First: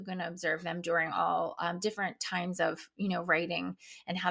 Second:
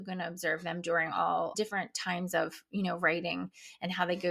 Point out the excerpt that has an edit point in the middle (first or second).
second